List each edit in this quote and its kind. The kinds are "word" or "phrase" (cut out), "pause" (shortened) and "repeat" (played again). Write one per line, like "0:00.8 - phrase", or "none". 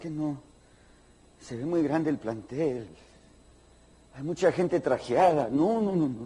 none